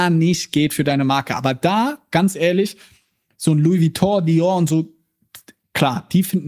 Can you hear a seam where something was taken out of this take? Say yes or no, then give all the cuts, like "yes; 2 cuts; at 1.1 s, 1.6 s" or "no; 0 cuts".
no; 0 cuts